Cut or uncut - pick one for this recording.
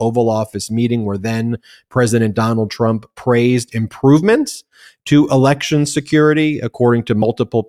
uncut